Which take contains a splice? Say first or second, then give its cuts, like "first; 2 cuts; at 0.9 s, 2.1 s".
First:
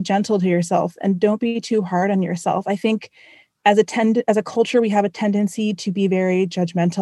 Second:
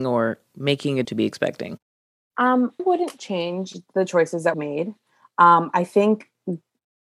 second; 3 cuts; at 1.0 s, 2.8 s, 4.5 s